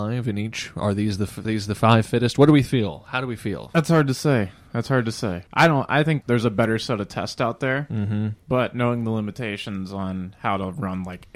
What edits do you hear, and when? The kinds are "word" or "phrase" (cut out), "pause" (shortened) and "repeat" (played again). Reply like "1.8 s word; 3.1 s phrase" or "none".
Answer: 1.4 s word; 5.5 s pause; 6.2 s word; 8.4 s pause